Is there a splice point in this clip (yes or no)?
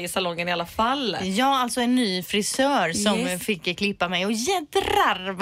no